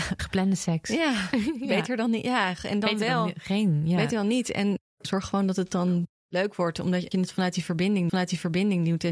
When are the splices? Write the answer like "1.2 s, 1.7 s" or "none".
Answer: 6.1 s, 7.1 s, 8.1 s